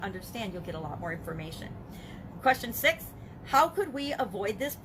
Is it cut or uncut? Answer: uncut